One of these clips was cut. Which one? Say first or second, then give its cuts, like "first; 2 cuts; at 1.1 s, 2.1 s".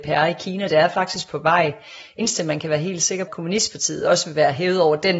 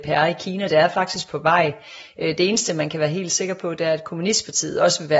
first; 2 cuts; at 2.2 s, 3.3 s